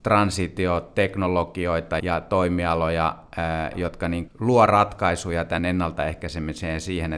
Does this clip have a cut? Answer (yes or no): yes